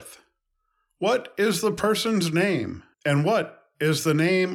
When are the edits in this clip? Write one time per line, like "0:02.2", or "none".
0:02.9